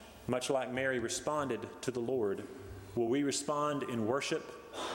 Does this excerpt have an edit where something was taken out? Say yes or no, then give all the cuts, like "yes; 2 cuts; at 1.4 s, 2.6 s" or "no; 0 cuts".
no; 0 cuts